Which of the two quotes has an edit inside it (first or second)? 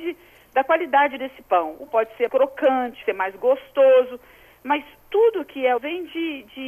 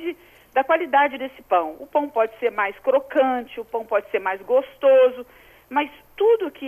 first